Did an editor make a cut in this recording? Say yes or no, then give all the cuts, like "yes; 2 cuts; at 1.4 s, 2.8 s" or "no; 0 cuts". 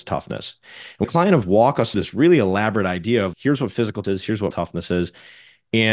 yes; 6 cuts; at 1.0 s, 1.4 s, 1.9 s, 3.3 s, 4.0 s, 4.5 s